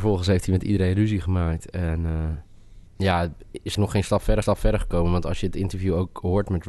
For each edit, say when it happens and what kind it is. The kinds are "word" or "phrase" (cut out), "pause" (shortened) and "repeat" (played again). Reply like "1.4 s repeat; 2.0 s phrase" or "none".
2.9 s pause; 3.7 s word; 4.4 s repeat